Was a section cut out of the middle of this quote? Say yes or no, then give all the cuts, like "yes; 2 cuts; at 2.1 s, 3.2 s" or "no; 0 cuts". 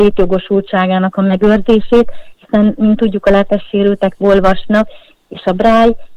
yes; 2 cuts; at 2.3 s, 4.2 s